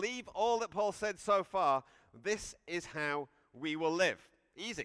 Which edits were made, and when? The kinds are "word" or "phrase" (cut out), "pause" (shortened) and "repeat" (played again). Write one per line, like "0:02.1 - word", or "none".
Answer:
none